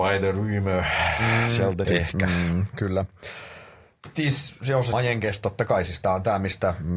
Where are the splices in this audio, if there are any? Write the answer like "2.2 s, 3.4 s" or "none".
1.8 s, 4.9 s